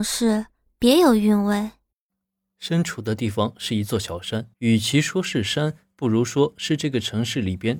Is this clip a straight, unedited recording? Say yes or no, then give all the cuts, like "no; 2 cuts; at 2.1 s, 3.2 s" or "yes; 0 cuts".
no; 2 cuts; at 2.2 s, 4.5 s